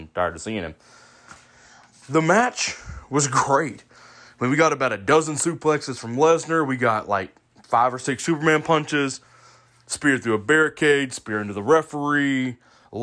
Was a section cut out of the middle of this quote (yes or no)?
no